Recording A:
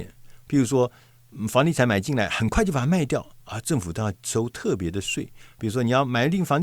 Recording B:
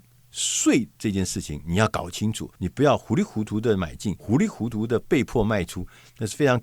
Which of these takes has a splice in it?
B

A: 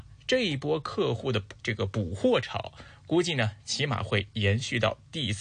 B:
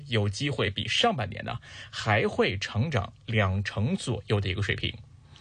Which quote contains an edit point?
A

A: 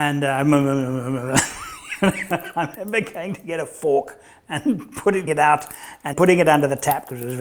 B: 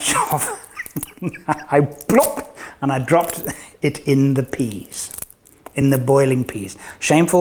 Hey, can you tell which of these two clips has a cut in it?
A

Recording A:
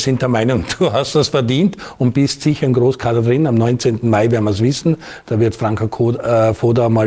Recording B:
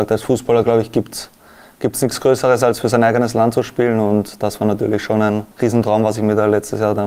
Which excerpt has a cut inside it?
B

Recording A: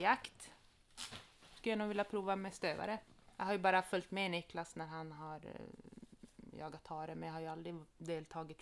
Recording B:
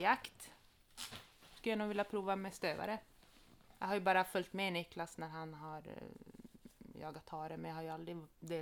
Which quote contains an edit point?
A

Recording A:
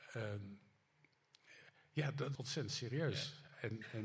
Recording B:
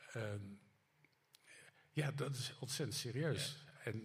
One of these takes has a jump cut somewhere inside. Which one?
A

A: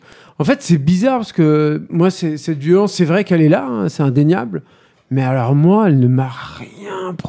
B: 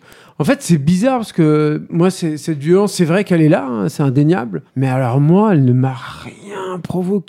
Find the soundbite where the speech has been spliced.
B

